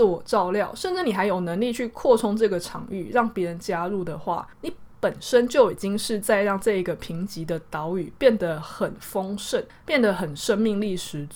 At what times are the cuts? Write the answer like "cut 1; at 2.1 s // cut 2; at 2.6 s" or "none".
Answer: cut 1; at 4.5 s // cut 2; at 9.7 s